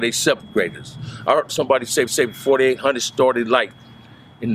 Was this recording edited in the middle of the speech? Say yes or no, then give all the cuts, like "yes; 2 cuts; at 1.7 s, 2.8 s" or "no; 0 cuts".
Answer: yes; 2 cuts; at 1.5 s, 2.1 s